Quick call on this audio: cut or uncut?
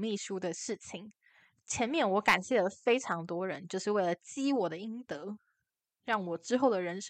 uncut